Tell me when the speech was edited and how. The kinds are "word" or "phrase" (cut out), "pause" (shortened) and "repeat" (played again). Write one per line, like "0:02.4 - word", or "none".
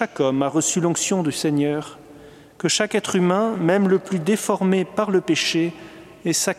none